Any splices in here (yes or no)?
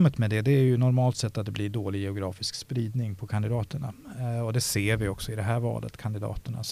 no